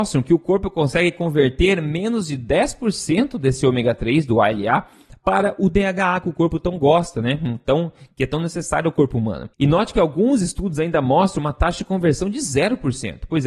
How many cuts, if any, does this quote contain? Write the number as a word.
one